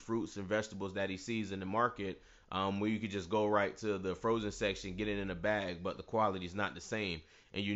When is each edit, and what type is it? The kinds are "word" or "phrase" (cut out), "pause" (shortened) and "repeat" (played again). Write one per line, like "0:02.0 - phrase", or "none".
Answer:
none